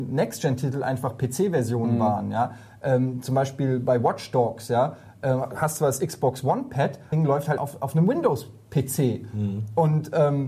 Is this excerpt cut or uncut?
cut